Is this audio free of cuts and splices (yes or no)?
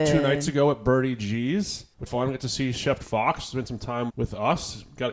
no